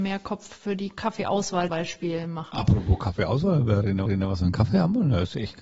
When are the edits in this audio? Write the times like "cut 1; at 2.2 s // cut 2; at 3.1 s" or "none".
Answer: cut 1; at 1.7 s // cut 2; at 4.1 s